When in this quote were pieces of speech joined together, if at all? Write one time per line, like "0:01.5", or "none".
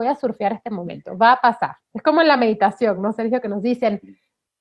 none